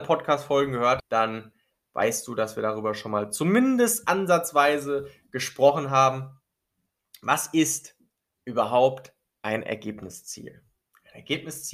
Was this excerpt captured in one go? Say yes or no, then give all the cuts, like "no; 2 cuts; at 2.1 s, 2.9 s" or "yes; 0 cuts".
no; 1 cut; at 1.0 s